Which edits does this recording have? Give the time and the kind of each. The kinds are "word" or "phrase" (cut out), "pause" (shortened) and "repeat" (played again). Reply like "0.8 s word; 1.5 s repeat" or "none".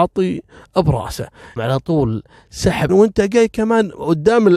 1.6 s word; 2.9 s word